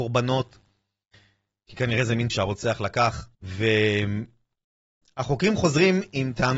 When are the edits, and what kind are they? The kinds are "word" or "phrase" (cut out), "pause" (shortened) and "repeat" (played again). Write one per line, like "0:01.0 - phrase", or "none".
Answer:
0:02.3 - word
0:03.3 - pause

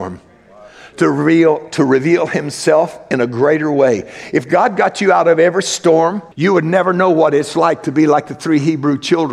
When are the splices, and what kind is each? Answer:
0:06.3 - pause

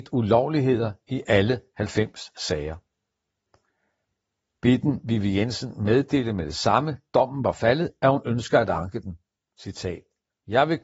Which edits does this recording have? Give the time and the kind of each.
none

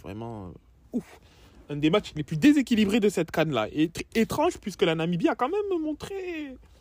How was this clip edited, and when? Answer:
none

